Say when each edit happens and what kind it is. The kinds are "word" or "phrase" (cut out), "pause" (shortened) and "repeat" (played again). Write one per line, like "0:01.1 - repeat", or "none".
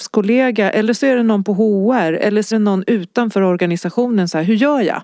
0:02.5 - word